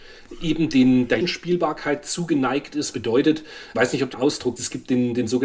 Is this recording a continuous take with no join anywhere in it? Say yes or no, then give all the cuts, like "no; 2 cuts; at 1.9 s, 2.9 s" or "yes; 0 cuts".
no; 5 cuts; at 1.2 s, 2.9 s, 3.7 s, 4.1 s, 4.6 s